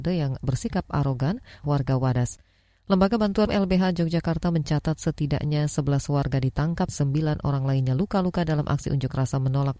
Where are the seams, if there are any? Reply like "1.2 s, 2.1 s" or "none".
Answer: 1.6 s, 3.5 s, 6.9 s